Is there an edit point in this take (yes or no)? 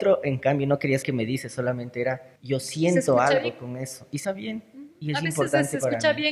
yes